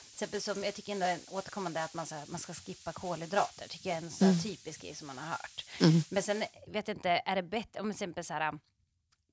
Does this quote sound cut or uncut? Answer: uncut